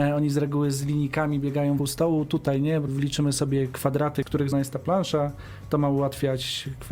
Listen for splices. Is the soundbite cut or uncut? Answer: cut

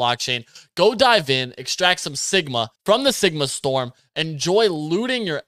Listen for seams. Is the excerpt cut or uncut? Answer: cut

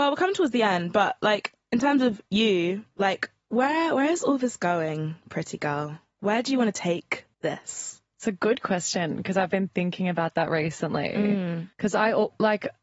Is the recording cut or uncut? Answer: cut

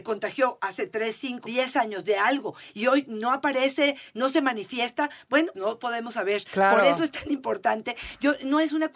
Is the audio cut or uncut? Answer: cut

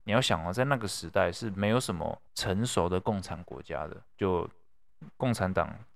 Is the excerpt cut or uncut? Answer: cut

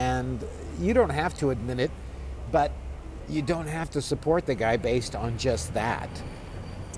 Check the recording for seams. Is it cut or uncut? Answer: uncut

